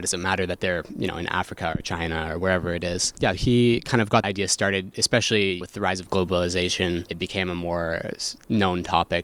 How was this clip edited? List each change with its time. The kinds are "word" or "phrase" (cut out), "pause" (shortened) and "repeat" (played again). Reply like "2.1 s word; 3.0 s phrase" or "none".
3.3 s word; 4.2 s word; 5.6 s word